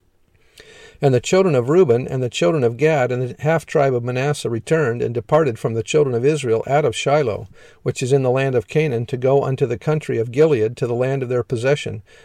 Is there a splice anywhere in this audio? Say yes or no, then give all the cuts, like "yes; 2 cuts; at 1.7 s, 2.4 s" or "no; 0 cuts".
no; 0 cuts